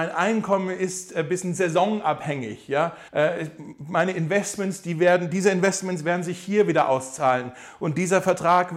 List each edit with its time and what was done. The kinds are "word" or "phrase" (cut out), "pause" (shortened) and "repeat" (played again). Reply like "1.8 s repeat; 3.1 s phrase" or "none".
3.1 s pause